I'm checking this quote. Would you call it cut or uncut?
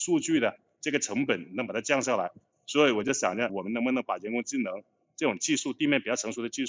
cut